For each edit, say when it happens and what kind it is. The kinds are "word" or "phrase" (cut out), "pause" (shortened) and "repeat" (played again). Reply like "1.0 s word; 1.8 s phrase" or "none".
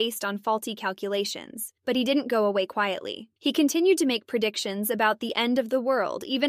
1.8 s pause; 3.4 s pause